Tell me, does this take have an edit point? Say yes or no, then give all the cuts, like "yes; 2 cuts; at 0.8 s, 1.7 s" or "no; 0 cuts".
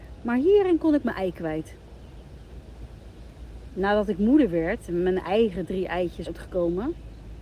yes; 1 cut; at 6.3 s